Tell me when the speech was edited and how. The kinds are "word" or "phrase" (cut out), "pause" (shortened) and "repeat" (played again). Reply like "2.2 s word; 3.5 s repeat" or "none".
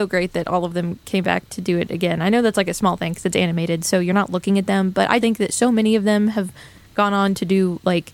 5.2 s word

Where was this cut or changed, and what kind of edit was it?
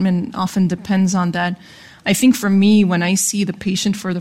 none

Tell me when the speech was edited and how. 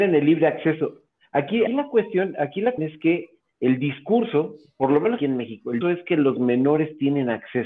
1.7 s word; 2.8 s word; 5.2 s word; 5.8 s word

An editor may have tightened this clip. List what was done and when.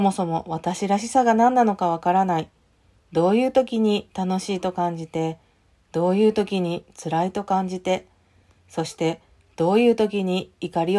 none

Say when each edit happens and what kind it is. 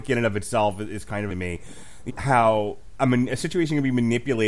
1.3 s word; 2.1 s phrase

